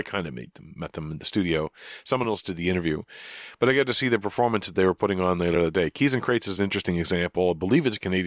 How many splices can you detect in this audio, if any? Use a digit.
0